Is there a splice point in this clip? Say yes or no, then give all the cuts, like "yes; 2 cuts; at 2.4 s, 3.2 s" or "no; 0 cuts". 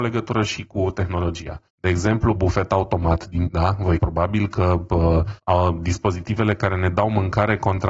yes; 5 cuts; at 1.7 s, 2.4 s, 3.5 s, 4.0 s, 5.4 s